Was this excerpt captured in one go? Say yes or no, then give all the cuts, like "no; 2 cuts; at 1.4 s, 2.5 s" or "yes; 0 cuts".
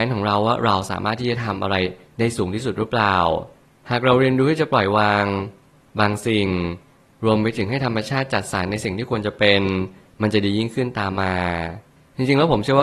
yes; 0 cuts